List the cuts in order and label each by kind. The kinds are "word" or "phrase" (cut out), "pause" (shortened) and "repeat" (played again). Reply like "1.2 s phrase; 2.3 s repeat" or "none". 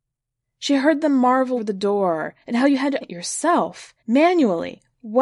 1.6 s word; 2.4 s pause; 3.0 s word; 4.0 s pause